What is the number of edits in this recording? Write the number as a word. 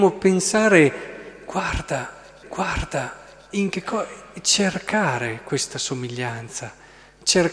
one